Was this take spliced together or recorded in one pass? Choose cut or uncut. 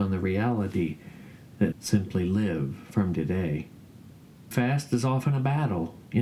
cut